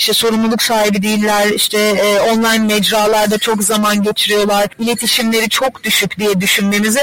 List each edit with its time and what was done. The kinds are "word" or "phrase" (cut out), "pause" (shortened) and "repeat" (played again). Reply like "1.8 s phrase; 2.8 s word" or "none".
none